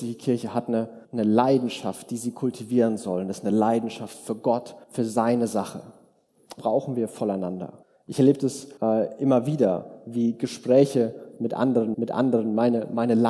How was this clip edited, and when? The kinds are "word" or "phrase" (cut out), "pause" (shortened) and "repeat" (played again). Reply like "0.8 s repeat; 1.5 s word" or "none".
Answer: 1.0 s pause; 4.8 s pause; 6.6 s word; 7.8 s pause; 8.8 s pause; 11.9 s repeat